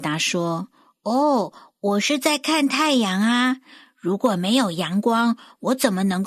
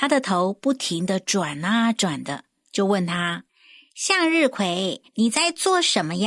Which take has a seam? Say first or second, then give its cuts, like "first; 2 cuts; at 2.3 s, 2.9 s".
second; 2 cuts; at 3.5 s, 5.1 s